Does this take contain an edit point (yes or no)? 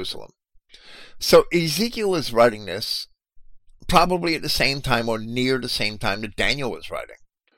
no